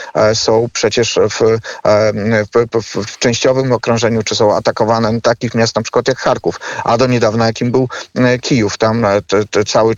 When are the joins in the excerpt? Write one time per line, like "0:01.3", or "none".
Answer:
none